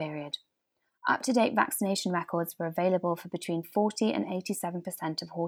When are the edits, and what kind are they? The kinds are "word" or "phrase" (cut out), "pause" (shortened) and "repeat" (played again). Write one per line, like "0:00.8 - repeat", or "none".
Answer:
none